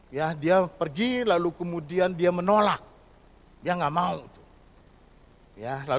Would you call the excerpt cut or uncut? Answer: uncut